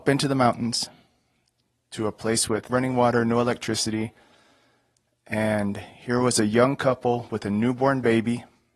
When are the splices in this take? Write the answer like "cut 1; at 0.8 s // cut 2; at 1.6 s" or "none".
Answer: cut 1; at 2.7 s